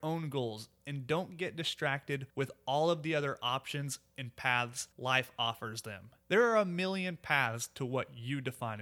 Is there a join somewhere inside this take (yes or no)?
yes